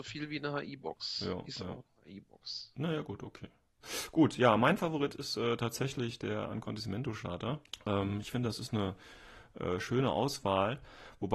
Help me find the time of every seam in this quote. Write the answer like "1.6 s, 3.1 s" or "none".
none